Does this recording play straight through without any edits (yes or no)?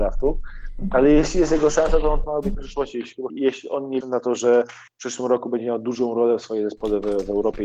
no